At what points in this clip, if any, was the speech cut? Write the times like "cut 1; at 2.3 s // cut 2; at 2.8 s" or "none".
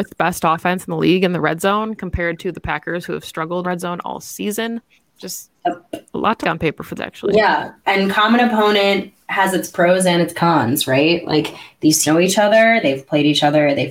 cut 1; at 3.6 s // cut 2; at 4.9 s // cut 3; at 6.4 s // cut 4; at 7.0 s // cut 5; at 12.0 s